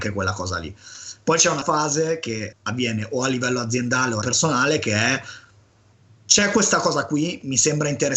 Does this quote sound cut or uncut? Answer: cut